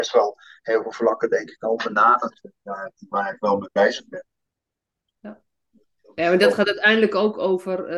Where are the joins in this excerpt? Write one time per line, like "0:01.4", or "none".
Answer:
none